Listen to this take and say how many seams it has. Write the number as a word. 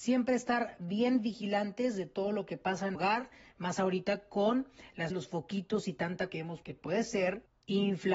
four